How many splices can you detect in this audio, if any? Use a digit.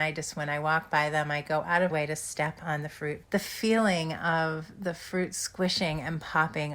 2